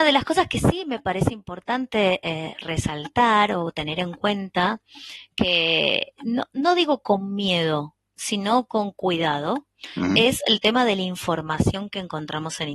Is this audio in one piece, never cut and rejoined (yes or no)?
yes